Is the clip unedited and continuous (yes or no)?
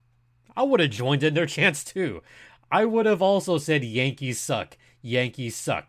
yes